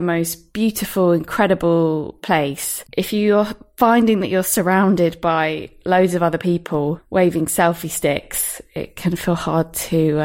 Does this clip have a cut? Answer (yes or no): no